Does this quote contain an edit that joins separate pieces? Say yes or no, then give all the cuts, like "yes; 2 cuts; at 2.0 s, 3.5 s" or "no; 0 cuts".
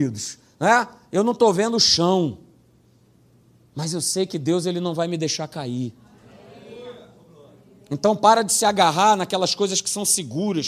no; 0 cuts